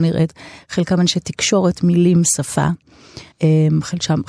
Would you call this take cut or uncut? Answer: cut